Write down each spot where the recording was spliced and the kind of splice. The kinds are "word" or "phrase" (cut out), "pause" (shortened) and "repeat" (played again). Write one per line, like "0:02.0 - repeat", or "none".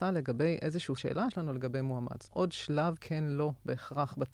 0:01.0 - word
0:01.3 - word
0:02.3 - phrase
0:03.0 - word